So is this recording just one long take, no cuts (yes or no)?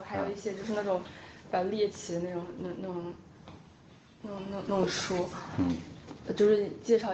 yes